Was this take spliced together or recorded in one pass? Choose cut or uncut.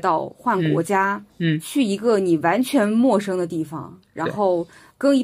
cut